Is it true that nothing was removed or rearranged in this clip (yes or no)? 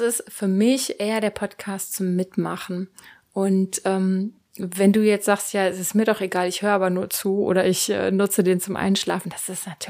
yes